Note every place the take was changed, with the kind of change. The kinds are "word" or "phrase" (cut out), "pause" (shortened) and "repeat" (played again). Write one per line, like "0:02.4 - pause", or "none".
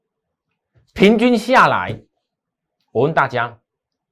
none